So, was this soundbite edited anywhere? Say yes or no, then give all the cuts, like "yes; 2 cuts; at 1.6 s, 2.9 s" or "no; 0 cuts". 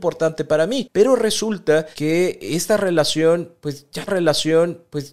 yes; 2 cuts; at 1.9 s, 4.1 s